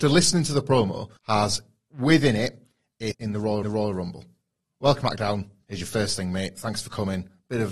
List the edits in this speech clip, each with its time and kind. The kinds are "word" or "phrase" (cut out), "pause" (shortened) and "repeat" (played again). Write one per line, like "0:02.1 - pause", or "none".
0:01.2 - pause
0:03.1 - word
0:03.6 - repeat
0:05.0 - word